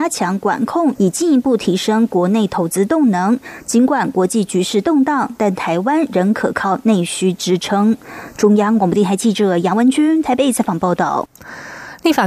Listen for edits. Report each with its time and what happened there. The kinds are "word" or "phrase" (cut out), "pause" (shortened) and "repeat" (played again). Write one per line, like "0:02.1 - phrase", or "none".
0:00.9 - phrase